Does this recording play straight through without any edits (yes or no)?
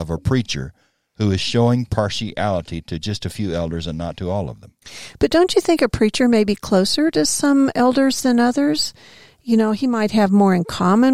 yes